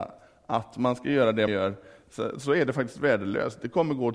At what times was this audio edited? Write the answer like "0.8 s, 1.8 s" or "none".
1.5 s